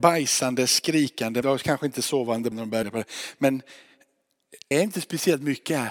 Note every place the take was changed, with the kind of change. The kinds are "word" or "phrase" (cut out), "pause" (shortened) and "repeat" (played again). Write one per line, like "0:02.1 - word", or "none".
0:01.4 - word
0:02.5 - word
0:02.8 - word
0:04.7 - word